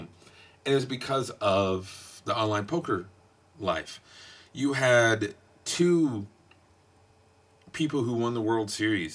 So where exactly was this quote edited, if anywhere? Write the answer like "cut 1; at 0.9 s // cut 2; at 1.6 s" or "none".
none